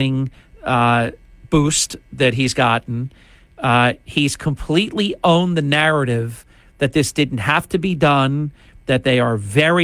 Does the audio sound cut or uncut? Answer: uncut